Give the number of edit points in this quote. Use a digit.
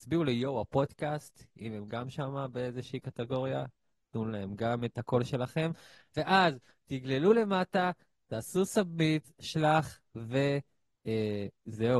0